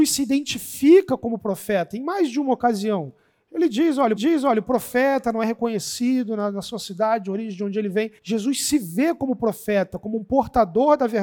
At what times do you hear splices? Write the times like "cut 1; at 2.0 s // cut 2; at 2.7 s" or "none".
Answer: cut 1; at 4.1 s // cut 2; at 8.2 s